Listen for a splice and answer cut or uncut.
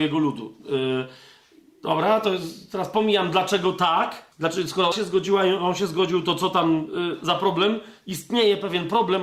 cut